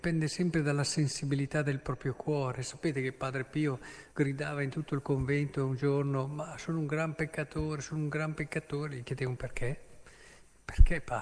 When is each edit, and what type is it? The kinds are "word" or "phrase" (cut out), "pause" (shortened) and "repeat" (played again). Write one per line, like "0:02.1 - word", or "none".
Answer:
0:04.1 - pause